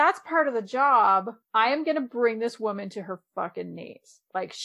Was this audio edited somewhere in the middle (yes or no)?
yes